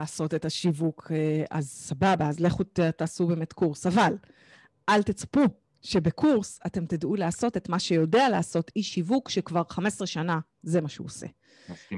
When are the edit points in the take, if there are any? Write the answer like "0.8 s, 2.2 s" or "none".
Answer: none